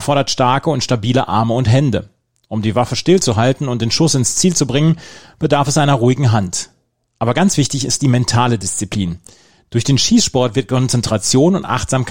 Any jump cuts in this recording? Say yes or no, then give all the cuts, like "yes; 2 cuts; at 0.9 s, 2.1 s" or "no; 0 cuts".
no; 0 cuts